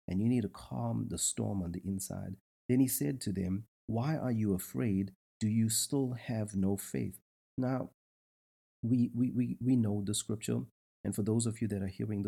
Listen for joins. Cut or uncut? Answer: uncut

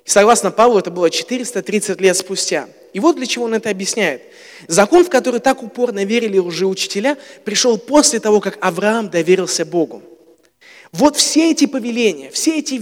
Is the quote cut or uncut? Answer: uncut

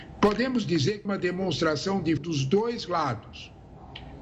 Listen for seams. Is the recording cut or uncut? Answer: cut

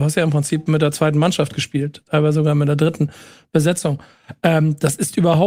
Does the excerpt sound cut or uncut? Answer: uncut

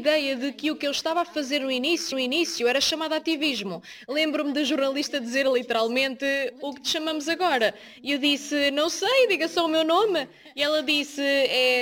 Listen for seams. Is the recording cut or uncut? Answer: cut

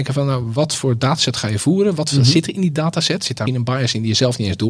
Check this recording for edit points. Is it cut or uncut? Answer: cut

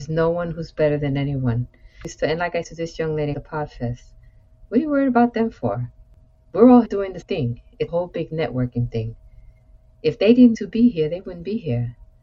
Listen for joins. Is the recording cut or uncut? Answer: cut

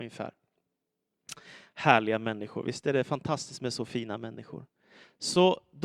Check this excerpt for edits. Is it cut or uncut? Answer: uncut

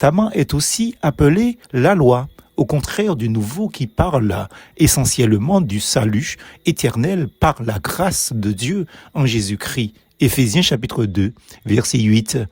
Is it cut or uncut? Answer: uncut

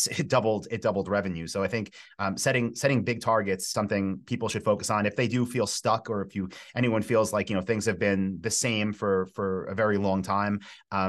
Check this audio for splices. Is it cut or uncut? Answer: cut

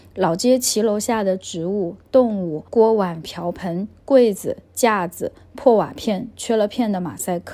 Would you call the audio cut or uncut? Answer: cut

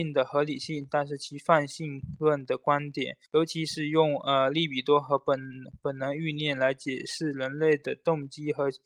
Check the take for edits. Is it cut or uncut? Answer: cut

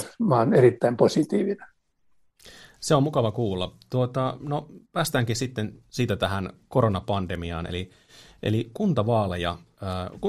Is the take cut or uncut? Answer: uncut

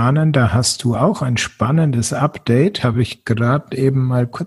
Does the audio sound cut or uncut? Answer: uncut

